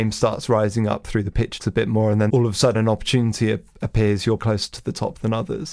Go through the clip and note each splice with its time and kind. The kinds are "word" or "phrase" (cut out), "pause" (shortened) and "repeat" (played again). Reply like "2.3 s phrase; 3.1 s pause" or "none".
1.6 s word; 2.3 s word; 2.7 s word; 4.4 s phrase